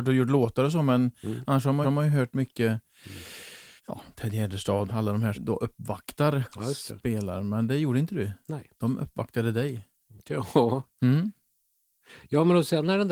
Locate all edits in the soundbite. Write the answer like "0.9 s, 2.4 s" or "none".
1.8 s, 3.8 s, 4.9 s, 5.3 s, 6.4 s, 8.7 s

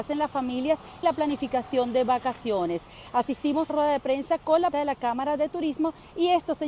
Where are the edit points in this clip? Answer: 1.0 s, 3.7 s, 4.7 s

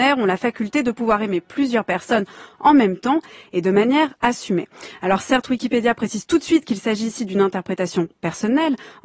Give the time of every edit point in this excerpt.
none

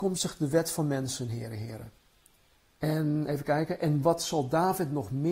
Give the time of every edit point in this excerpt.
2.6 s

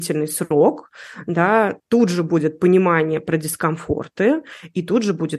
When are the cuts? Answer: 1.8 s

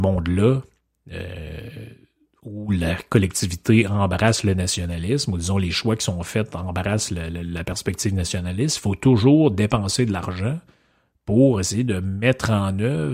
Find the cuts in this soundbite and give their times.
none

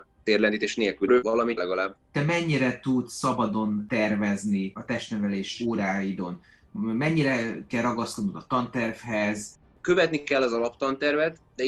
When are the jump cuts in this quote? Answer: 1.1 s, 1.6 s

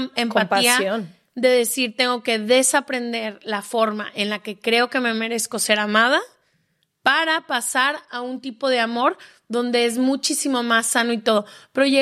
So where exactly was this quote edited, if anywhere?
none

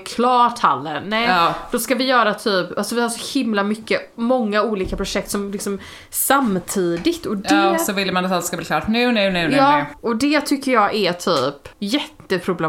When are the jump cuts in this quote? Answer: 10.0 s, 11.7 s

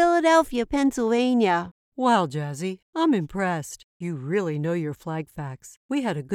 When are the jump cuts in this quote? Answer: none

